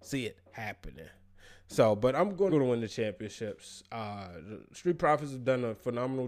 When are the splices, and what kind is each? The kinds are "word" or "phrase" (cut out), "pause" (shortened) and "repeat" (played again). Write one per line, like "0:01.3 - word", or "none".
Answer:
0:02.5 - phrase